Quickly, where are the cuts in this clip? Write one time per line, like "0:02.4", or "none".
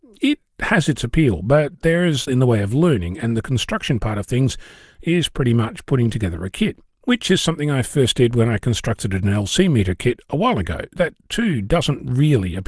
0:02.3
0:11.0